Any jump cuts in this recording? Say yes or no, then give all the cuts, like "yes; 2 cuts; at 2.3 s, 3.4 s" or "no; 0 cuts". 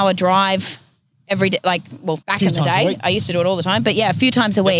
yes; 1 cut; at 2.2 s